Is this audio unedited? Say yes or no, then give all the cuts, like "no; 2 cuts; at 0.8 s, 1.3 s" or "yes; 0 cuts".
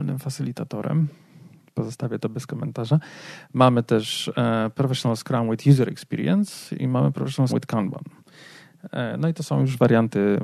no; 1 cut; at 7.5 s